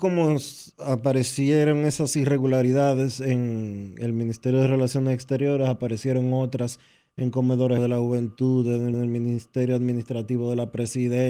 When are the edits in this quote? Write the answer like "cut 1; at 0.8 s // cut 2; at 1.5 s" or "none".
cut 1; at 7.8 s // cut 2; at 8.9 s